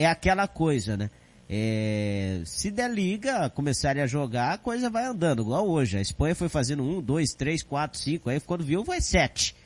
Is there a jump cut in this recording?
no; 0 cuts

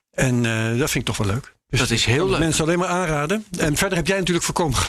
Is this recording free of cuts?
yes; 0 cuts

